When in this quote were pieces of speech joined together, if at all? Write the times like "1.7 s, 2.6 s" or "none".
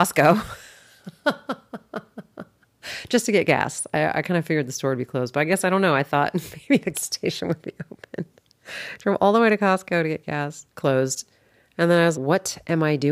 6.9 s, 10.7 s, 12.1 s